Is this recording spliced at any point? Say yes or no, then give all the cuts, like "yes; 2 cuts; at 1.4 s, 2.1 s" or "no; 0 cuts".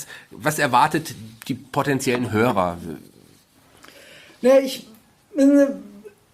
no; 0 cuts